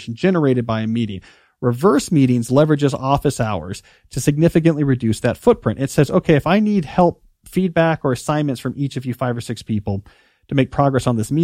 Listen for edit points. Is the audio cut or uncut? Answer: uncut